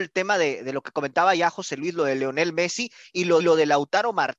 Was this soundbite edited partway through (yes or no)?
yes